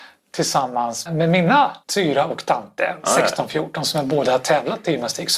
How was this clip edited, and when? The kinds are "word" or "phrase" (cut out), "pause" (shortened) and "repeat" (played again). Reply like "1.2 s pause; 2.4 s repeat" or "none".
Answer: 1.1 s word; 1.8 s pause

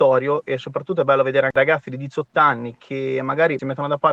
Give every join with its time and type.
none

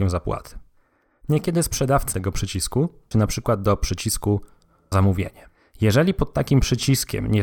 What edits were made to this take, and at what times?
2.1 s phrase; 3.1 s word; 4.9 s word

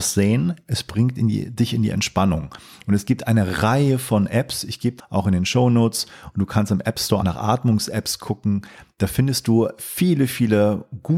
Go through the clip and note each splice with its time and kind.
5.0 s phrase; 7.2 s word

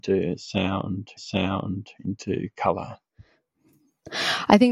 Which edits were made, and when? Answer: 1.2 s repeat

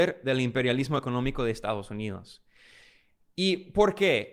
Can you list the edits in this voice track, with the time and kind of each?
none

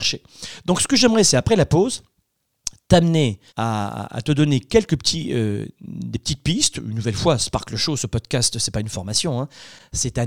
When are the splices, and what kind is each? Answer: 3.5 s pause

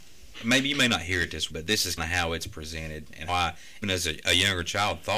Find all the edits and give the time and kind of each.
1.5 s word; 2.0 s word; 3.3 s word; 3.8 s word

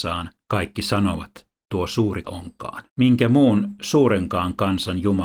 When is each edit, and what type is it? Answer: 1.6 s phrase; 2.2 s word; 2.9 s pause

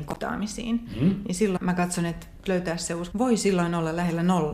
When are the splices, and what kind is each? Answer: 1.6 s word; 2.5 s word; 3.1 s word

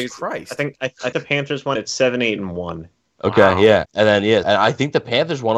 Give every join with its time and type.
1.1 s word; 1.8 s word; 3.9 s word; 4.4 s word

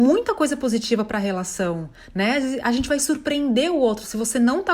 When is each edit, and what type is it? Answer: none

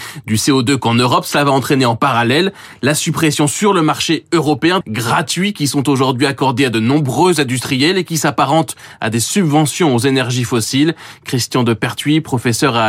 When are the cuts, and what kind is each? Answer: 4.8 s phrase

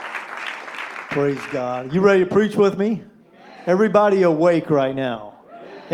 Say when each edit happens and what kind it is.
none

